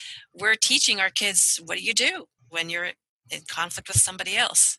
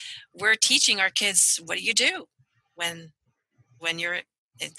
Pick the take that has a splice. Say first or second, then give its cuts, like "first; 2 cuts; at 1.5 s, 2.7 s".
first; 1 cut; at 2.4 s